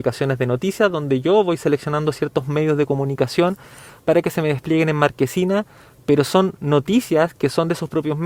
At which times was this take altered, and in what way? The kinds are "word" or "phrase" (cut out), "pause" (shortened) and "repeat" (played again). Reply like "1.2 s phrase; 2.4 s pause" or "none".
none